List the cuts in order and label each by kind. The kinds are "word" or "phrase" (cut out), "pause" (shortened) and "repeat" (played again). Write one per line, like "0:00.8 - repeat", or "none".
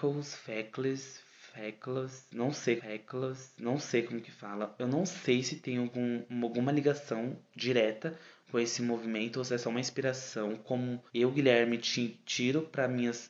0:02.8 - repeat
0:11.1 - pause